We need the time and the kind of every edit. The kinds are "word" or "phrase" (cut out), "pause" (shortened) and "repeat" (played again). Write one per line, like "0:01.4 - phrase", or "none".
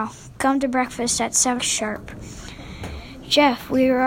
0:01.6 - word